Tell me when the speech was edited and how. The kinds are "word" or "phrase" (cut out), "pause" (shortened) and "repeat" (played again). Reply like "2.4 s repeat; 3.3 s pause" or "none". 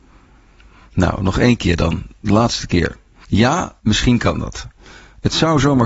none